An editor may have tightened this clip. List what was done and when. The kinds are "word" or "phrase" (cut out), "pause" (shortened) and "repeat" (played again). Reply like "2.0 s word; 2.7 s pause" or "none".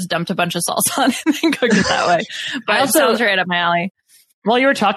none